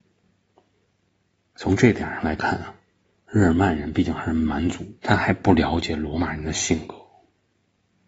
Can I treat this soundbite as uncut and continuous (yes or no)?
no